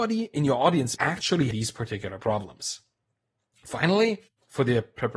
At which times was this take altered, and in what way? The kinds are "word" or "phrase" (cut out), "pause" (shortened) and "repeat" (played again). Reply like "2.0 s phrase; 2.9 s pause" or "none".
1.0 s word; 1.5 s phrase